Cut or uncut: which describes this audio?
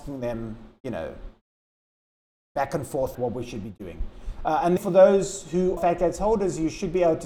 cut